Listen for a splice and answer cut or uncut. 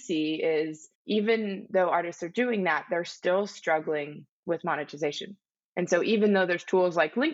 cut